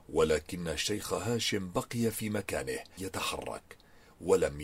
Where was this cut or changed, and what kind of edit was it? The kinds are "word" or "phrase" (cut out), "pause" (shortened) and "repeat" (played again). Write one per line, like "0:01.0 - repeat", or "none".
0:03.0 - word